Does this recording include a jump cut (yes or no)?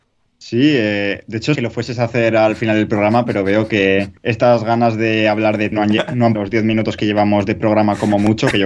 yes